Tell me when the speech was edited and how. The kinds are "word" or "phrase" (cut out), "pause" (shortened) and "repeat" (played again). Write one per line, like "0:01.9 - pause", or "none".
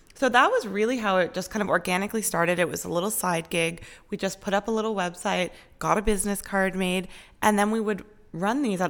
none